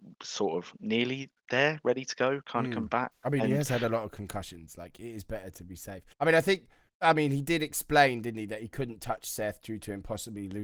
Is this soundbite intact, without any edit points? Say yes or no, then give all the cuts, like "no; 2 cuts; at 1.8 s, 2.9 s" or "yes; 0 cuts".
no; 2 cuts; at 6.1 s, 6.9 s